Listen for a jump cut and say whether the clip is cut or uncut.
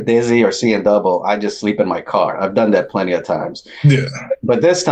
uncut